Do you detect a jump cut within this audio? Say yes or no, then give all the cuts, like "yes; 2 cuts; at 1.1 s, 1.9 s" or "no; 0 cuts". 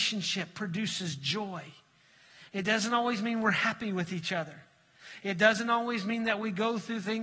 no; 0 cuts